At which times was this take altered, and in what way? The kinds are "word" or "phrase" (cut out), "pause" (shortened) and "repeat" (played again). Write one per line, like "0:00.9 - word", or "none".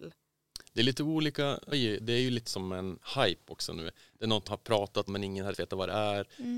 0:01.7 - word
0:02.5 - word
0:04.5 - word
0:05.1 - word
0:05.5 - word